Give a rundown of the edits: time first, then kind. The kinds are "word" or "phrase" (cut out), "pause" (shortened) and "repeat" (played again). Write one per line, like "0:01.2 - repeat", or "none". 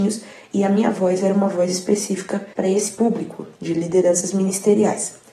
0:02.5 - pause